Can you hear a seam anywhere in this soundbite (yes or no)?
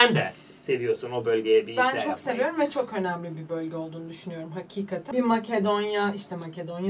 no